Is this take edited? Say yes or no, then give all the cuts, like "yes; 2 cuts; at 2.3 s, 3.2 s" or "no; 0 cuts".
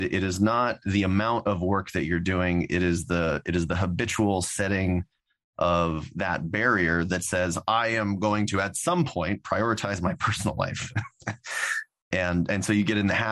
no; 0 cuts